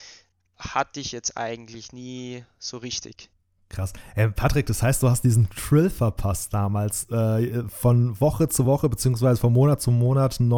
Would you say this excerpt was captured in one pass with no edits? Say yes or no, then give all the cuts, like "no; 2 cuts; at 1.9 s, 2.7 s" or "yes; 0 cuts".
yes; 0 cuts